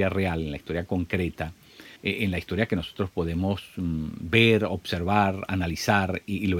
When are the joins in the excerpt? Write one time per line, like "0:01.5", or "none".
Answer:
0:02.0